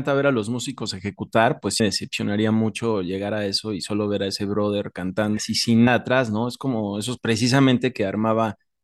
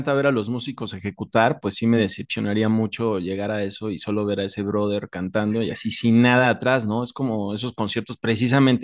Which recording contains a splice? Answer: first; 4 cuts; at 1.8 s, 5.4 s, 5.9 s, 7.2 s

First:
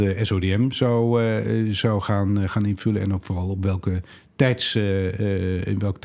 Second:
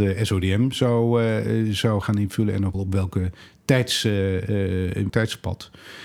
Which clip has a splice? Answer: second; 3 cuts; at 2.0 s, 2.7 s, 5.1 s

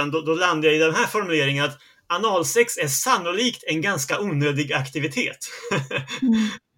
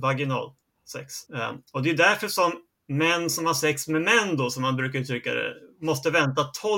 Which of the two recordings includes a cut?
second; 1 cut; at 1.3 s

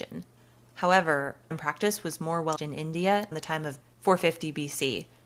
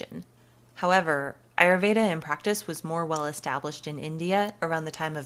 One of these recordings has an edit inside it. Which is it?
first; 4 cuts; at 1.5 s, 2.6 s, 3.3 s, 3.8 s

